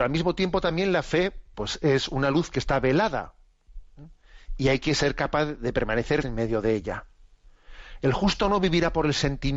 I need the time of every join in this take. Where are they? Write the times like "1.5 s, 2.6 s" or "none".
1.5 s, 6.2 s